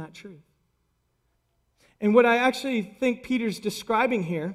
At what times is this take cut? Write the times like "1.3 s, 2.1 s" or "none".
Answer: none